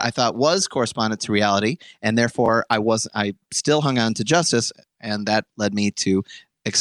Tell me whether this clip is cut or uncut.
uncut